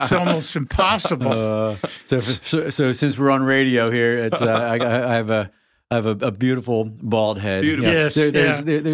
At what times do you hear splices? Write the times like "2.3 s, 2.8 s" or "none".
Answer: none

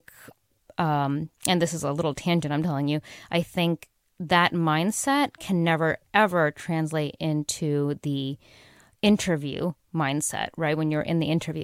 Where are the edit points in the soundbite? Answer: none

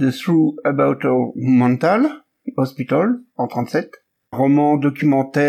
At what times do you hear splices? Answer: 4.3 s

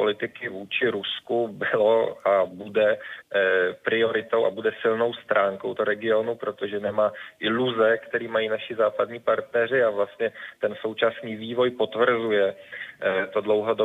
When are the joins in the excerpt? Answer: 5.8 s

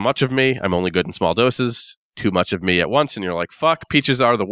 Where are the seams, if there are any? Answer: 2.0 s

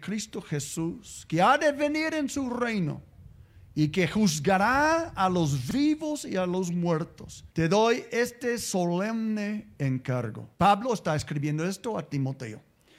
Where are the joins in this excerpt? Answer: 7.5 s, 10.5 s

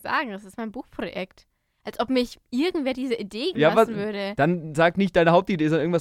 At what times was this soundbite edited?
3.5 s

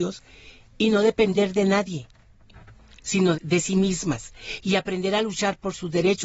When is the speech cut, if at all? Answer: 3.4 s

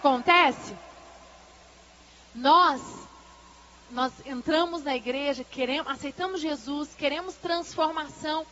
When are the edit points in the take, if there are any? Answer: none

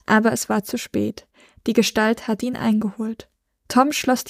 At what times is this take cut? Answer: none

